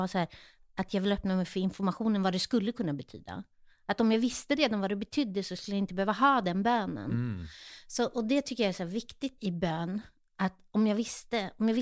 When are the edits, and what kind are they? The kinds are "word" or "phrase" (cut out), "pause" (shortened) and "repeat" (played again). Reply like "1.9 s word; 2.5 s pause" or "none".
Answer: 9.4 s word